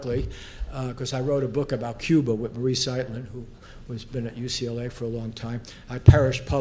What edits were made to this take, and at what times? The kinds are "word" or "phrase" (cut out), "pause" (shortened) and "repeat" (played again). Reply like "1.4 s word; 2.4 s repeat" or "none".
none

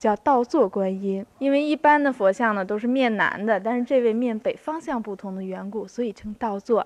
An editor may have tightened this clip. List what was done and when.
1.3 s pause

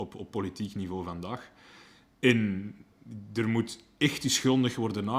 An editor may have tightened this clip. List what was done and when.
none

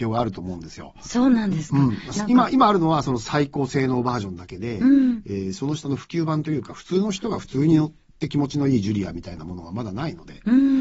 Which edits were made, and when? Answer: none

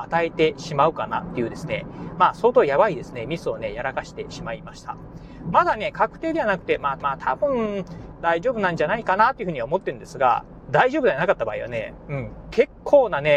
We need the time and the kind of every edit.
7.0 s repeat

